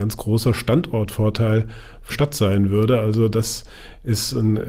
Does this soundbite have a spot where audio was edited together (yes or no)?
yes